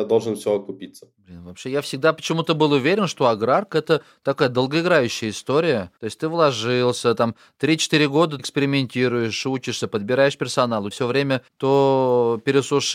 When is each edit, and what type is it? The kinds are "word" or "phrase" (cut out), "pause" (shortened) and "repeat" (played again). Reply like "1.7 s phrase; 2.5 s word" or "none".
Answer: 6.0 s pause; 8.4 s word; 10.9 s word; 11.5 s pause